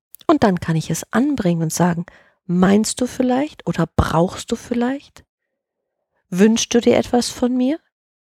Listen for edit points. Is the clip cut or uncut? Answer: uncut